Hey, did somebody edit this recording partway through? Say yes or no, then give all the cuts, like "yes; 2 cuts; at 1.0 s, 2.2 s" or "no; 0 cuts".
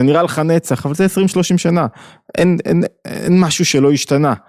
no; 0 cuts